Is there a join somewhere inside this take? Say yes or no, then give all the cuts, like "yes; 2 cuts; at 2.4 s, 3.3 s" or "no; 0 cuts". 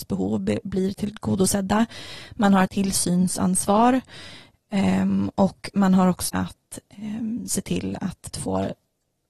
yes; 3 cuts; at 2.7 s, 6.3 s, 8.3 s